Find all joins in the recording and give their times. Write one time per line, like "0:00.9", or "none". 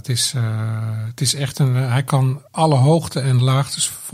0:02.5